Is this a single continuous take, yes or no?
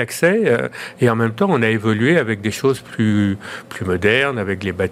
yes